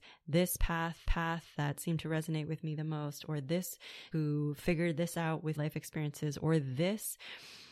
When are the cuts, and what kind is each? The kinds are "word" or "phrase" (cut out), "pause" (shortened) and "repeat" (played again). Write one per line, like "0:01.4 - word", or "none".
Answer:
0:01.0 - repeat
0:04.1 - word
0:05.6 - word